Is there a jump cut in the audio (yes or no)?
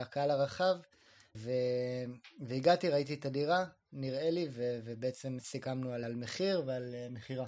yes